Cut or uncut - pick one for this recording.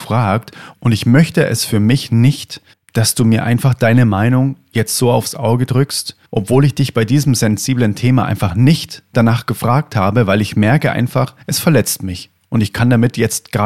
cut